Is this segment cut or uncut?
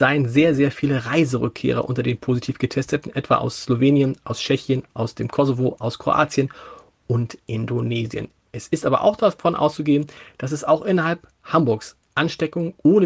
uncut